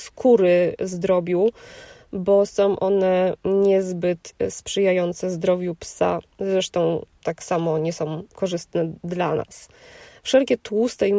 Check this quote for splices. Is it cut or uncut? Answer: uncut